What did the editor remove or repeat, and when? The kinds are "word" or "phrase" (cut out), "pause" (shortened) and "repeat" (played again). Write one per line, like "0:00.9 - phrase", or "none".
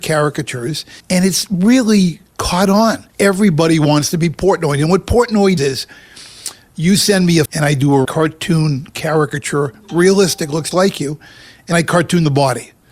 0:01.0 - pause
0:02.3 - pause
0:03.1 - pause
0:05.6 - word
0:07.5 - word
0:08.0 - word
0:10.7 - word
0:11.7 - word